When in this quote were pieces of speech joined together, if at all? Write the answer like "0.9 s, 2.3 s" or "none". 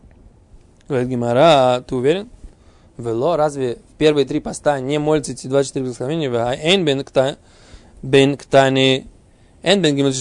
none